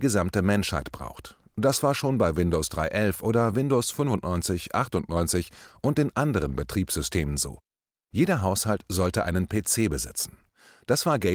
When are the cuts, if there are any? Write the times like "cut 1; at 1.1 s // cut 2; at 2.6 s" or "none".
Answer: none